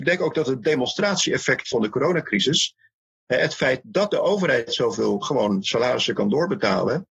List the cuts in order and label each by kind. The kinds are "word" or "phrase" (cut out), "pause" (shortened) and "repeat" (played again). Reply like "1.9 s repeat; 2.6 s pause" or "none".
none